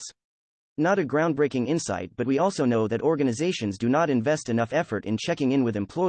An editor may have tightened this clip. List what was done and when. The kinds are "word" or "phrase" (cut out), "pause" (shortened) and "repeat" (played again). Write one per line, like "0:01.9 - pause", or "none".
none